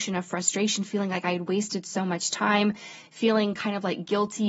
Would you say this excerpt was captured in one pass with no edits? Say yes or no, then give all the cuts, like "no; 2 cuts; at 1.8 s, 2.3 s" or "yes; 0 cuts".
yes; 0 cuts